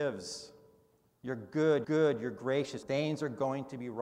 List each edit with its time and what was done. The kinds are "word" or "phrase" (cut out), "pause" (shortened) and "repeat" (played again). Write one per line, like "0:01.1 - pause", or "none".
0:01.8 - repeat
0:02.8 - word